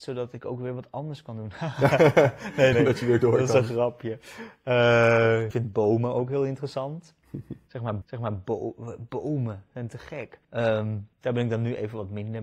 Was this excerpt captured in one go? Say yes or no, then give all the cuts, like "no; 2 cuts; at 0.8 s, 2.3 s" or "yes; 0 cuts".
no; 4 cuts; at 2.7 s, 5.5 s, 8.0 s, 11.1 s